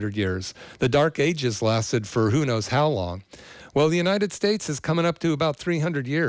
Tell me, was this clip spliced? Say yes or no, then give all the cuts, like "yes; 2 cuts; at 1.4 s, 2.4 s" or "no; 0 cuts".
no; 0 cuts